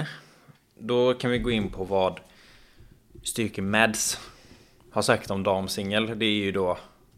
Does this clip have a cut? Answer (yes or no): no